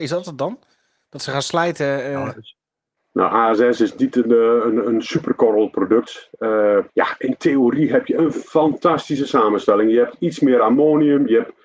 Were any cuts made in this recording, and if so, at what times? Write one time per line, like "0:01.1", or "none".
0:03.0
0:06.9